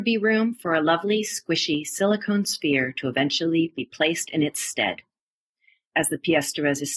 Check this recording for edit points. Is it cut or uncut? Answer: uncut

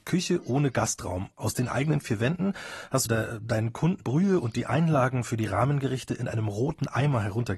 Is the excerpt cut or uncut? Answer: cut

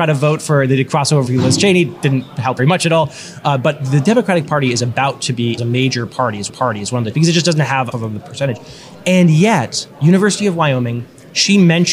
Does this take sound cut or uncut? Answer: cut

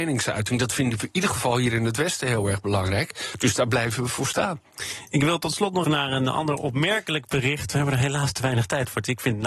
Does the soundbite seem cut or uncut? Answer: cut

